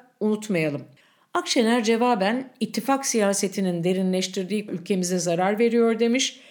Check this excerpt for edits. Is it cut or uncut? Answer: cut